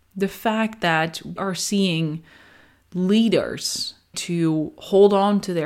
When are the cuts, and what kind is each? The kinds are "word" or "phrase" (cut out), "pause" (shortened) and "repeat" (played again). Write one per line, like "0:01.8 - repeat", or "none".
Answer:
0:01.4 - word
0:04.1 - word